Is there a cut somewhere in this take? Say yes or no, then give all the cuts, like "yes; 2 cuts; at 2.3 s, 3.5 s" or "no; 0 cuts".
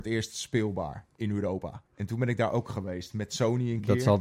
yes; 1 cut; at 1.9 s